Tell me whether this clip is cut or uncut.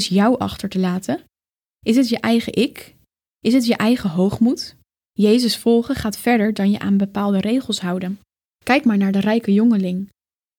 uncut